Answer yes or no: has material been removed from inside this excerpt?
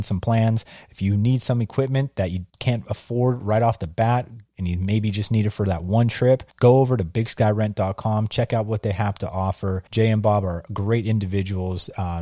yes